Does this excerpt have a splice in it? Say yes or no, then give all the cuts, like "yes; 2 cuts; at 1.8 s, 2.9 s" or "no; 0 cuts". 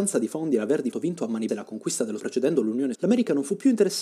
yes; 4 cuts; at 0.9 s, 1.5 s, 2.2 s, 2.9 s